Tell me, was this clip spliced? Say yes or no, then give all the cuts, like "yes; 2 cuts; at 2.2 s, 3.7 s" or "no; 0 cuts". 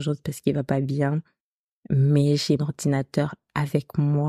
yes; 1 cut; at 2.6 s